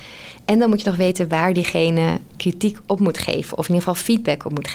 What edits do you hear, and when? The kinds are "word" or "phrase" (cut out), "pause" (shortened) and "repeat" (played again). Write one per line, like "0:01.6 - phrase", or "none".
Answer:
none